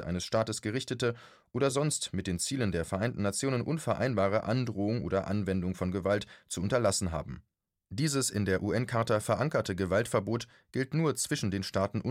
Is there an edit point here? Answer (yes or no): no